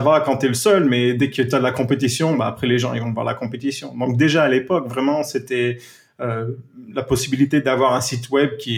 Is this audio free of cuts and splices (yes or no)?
yes